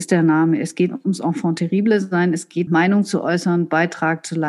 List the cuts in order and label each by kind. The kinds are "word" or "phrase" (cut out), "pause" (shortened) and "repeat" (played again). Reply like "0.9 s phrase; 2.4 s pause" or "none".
2.7 s word